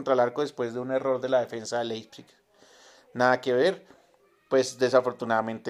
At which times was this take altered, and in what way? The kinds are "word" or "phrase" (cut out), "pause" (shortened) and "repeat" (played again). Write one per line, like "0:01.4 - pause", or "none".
none